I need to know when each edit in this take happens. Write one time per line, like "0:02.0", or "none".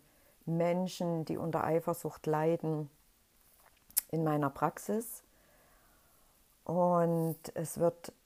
none